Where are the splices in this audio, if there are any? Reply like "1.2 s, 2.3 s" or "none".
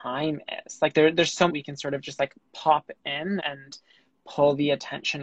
1.5 s, 3.4 s

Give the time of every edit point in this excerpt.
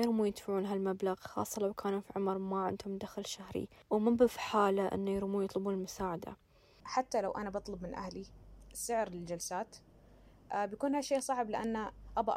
none

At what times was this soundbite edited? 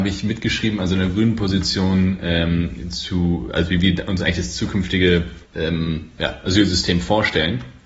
5.4 s

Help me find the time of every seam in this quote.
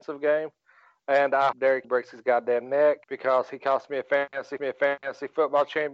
1.5 s, 1.8 s, 3.0 s, 4.6 s

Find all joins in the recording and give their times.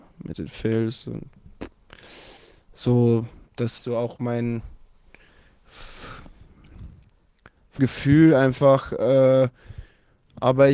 3.5 s, 3.8 s, 7.8 s

